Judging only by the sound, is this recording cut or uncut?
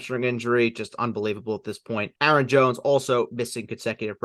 cut